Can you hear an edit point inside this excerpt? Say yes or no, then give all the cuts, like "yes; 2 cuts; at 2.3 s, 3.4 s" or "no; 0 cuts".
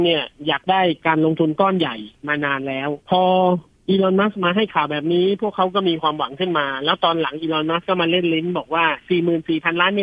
yes; 1 cut; at 3.0 s